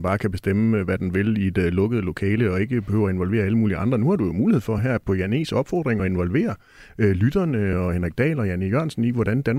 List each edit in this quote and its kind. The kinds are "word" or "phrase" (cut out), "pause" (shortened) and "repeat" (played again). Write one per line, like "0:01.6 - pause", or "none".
none